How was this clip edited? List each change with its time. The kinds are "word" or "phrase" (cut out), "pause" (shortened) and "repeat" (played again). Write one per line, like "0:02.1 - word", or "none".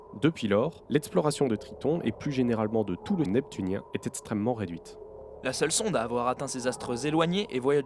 0:03.2 - word